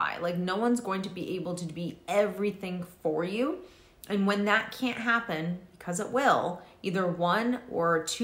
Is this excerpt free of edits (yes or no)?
yes